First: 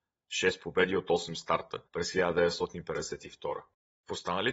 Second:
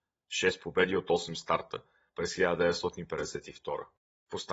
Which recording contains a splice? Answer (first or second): first